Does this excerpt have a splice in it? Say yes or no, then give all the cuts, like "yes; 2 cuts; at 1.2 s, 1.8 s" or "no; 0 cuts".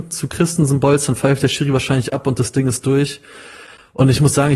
no; 0 cuts